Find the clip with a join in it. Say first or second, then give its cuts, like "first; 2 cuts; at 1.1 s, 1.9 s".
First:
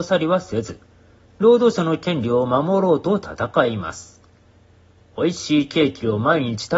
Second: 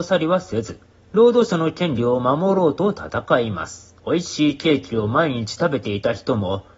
second; 2 cuts; at 0.9 s, 4.0 s